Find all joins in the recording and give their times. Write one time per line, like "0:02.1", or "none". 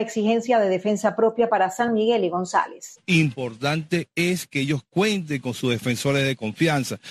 none